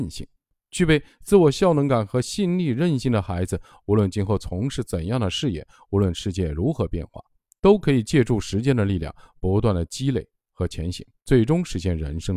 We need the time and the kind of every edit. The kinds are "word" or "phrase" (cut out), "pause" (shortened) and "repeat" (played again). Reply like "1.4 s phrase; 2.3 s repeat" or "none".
11.2 s pause